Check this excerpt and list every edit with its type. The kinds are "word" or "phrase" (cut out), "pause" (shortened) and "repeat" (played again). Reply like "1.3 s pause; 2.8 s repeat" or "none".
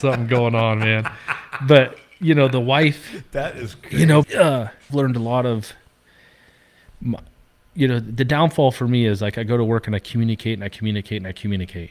4.2 s word; 4.9 s phrase